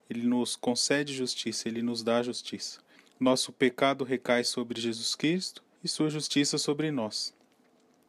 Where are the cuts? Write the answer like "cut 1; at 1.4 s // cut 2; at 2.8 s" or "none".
cut 1; at 2.9 s // cut 2; at 5.7 s